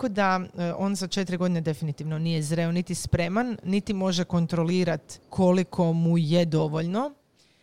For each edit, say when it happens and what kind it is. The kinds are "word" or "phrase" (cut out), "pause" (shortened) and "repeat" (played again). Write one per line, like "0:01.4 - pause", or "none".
0:05.2 - pause